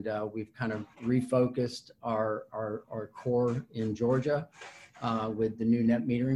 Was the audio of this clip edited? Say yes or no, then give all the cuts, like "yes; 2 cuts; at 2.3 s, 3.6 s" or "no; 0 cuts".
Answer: yes; 1 cut; at 0.9 s